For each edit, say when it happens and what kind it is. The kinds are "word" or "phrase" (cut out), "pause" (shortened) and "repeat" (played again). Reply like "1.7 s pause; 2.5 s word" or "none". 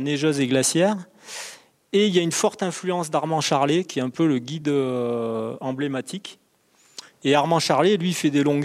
none